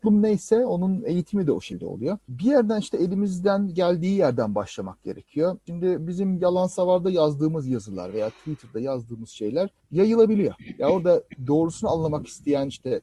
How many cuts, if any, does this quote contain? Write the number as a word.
zero